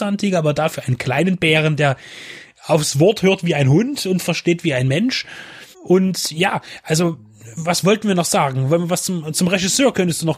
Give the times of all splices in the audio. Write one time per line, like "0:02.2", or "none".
0:05.7